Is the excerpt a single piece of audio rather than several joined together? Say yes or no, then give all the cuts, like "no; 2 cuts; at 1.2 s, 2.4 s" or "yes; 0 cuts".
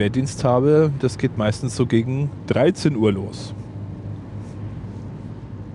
yes; 0 cuts